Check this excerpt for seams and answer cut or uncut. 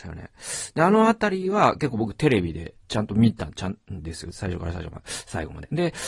cut